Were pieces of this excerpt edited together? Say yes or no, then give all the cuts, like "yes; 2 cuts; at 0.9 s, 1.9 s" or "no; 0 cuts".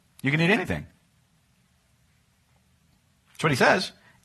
no; 0 cuts